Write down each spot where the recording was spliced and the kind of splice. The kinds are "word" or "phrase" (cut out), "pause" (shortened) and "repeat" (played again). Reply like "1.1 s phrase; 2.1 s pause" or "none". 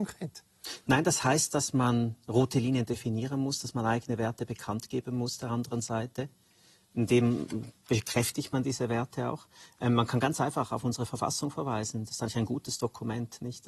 none

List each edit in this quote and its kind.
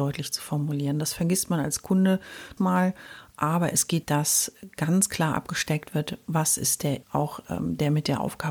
2.6 s word; 4.0 s word; 7.0 s word

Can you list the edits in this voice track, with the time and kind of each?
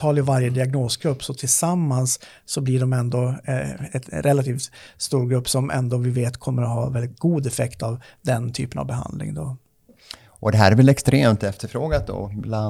none

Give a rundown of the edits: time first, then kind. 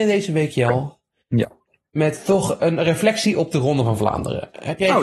none

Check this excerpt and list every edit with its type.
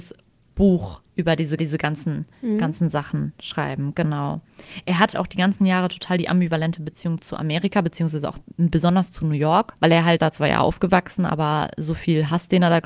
1.1 s pause; 1.6 s repeat; 5.1 s word; 7.2 s word; 9.8 s pause; 10.2 s phrase

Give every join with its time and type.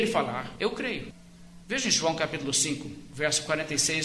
none

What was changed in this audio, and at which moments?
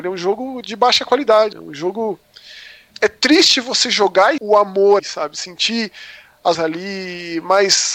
1.5 s word; 2.9 s word; 4.4 s word; 5.0 s word; 6.5 s word

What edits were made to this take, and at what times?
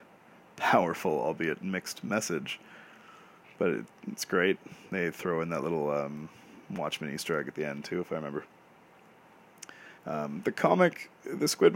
3.4 s pause; 10.0 s pause

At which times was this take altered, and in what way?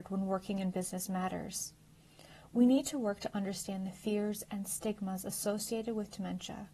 none

